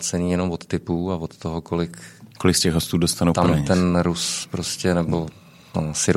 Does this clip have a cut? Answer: yes; 1 cut; at 2.3 s

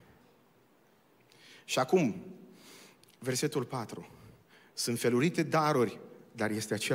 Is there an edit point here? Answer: no; 0 cuts

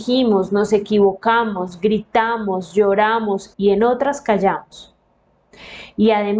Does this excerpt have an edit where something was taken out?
yes; 1 cut; at 3.5 s

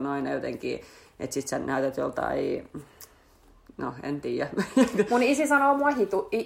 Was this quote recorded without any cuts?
yes; 0 cuts

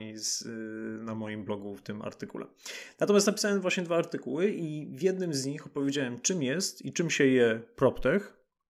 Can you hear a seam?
no; 0 cuts

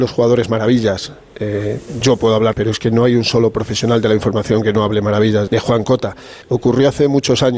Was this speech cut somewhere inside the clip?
yes; 3 cuts; at 2.5 s, 5.5 s, 6.4 s

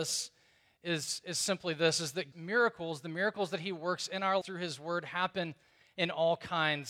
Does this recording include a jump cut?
yes; 2 cuts; at 2.3 s, 4.4 s

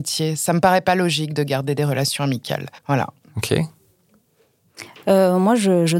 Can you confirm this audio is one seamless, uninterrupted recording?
no; 1 cut; at 2.8 s

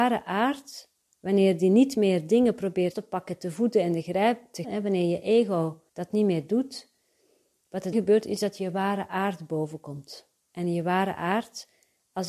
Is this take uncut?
no; 6 cuts; at 1.0 s, 2.9 s, 4.6 s, 5.9 s, 7.9 s, 10.4 s

